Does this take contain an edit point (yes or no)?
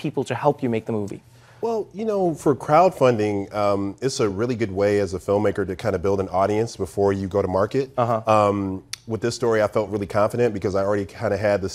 no